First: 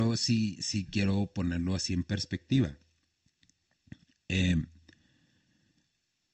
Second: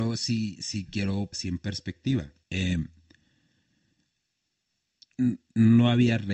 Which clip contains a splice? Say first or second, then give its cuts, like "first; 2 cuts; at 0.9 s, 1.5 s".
second; 2 cuts; at 1.3 s, 2.4 s